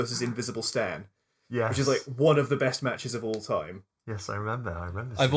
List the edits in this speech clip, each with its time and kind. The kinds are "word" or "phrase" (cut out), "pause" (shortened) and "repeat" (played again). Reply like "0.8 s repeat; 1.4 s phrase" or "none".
none